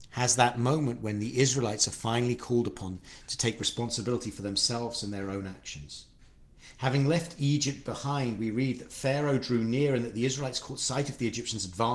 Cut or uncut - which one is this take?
uncut